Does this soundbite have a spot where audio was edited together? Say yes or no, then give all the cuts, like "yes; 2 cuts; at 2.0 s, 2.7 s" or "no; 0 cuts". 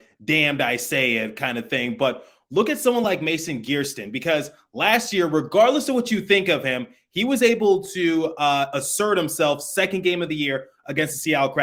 no; 0 cuts